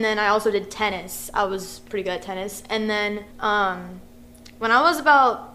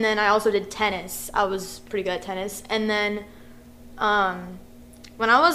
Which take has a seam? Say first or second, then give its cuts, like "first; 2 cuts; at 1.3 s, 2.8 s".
first; 1 cut; at 3.3 s